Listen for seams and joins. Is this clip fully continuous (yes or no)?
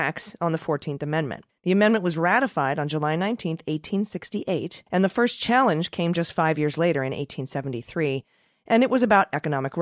no